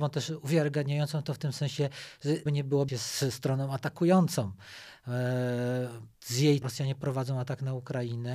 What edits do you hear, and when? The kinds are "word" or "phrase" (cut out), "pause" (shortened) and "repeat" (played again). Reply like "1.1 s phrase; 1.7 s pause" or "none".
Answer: 2.5 s word; 2.9 s word; 6.2 s pause; 6.6 s word